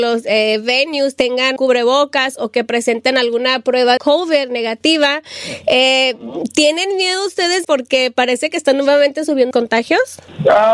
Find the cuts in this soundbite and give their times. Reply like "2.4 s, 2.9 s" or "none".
1.6 s, 4.0 s, 7.6 s, 9.5 s

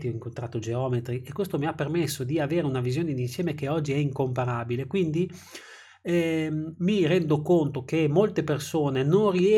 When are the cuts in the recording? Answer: none

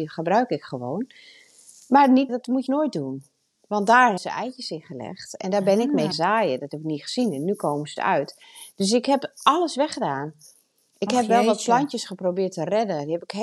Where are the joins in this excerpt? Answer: 2.3 s, 2.7 s, 4.2 s, 6.1 s, 8.0 s

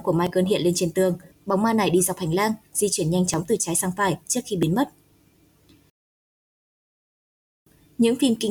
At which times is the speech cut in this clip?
none

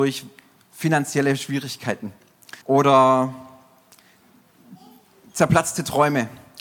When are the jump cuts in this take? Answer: 2.6 s

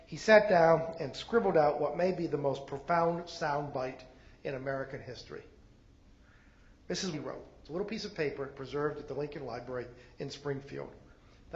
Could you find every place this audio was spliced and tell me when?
7.1 s

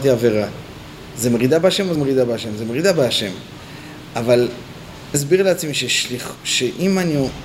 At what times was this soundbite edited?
2.0 s, 5.1 s

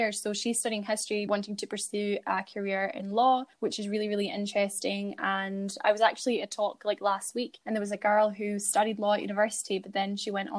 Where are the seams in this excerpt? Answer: 1.3 s, 3.5 s, 7.6 s

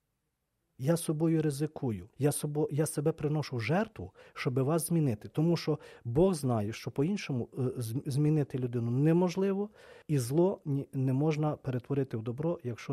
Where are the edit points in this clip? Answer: 2.1 s, 10.0 s

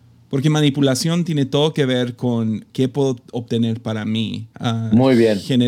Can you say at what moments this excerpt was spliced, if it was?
2.7 s, 4.5 s

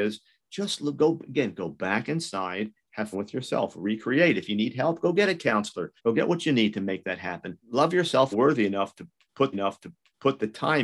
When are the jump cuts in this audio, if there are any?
3.1 s, 6.0 s, 7.6 s, 8.3 s, 9.5 s

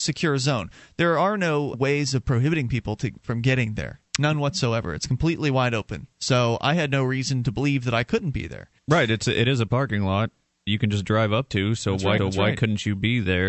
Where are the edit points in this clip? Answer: 1.7 s, 6.1 s, 8.8 s, 9.7 s, 10.7 s, 12.2 s

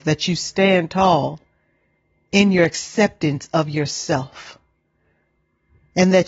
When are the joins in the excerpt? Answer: none

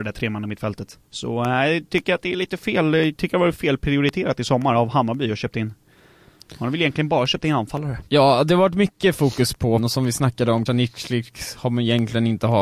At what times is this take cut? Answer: 1.0 s, 8.1 s, 9.8 s, 10.7 s

